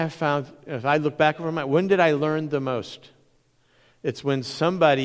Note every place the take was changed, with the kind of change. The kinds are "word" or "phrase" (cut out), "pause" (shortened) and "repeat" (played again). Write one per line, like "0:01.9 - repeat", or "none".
none